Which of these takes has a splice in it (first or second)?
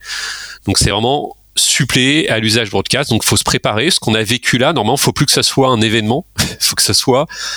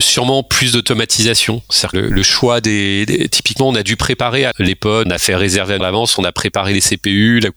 second